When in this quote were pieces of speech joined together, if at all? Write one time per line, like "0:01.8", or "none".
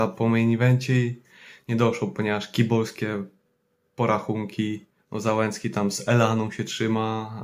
0:05.0